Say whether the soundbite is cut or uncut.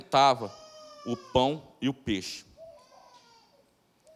uncut